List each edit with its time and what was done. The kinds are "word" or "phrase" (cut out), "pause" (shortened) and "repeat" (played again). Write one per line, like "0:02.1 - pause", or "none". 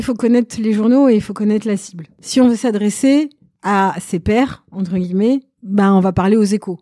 none